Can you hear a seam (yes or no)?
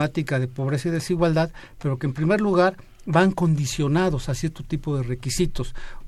no